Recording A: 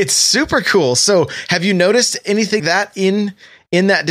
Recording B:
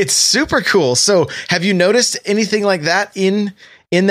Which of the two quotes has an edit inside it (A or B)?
A